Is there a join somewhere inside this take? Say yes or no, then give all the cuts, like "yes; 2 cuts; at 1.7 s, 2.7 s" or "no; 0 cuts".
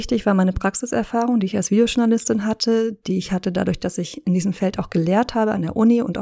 no; 0 cuts